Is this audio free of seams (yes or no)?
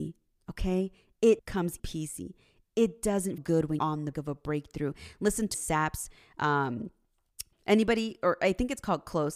no